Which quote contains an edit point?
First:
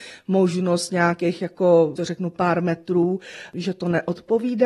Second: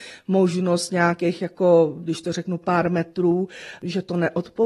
first; 1 cut; at 1.9 s

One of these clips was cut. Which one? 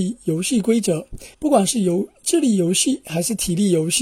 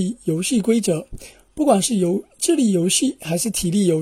first; 1 cut; at 1.3 s

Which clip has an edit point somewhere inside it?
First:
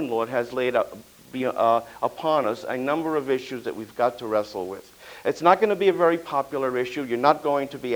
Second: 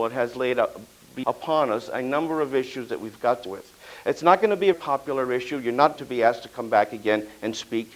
second; 4 cuts; at 1.2 s, 3.5 s, 4.7 s, 6.0 s

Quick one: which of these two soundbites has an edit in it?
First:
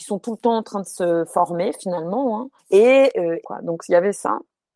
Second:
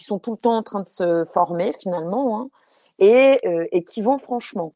first; 2 cuts; at 2.6 s, 3.4 s

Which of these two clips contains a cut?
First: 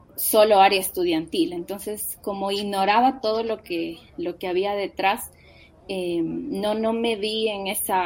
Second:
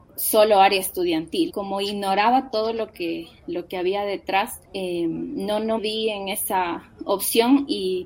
second; 3 cuts; at 1.5 s, 4.6 s, 5.8 s

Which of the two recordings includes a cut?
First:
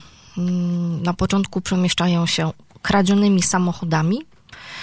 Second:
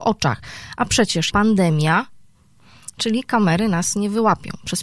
second; 1 cut; at 1.3 s

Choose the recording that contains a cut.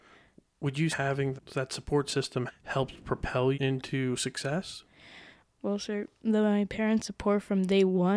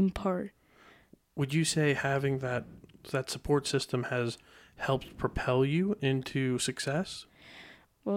first; 5 cuts; at 0.9 s, 1.4 s, 2.5 s, 3.5 s, 6.2 s

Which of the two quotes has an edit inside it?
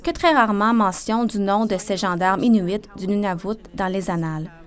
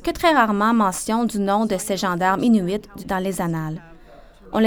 second; 1 cut; at 3.0 s

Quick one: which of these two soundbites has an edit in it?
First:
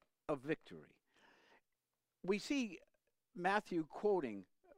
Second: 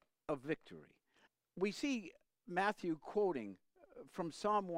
second; 2 cuts; at 1.3 s, 2.3 s

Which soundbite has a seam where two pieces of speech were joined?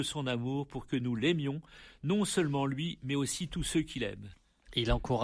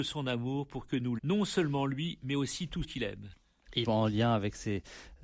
second; 3 cuts; at 1.2 s, 2.8 s, 3.8 s

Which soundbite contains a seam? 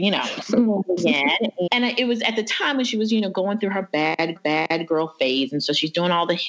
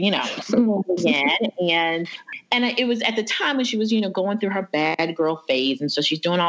first; 2 cuts; at 1.7 s, 4.4 s

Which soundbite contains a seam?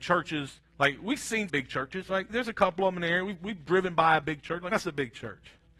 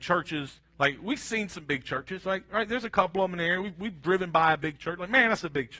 first; 3 cuts; at 1.5 s, 2.3 s, 4.7 s

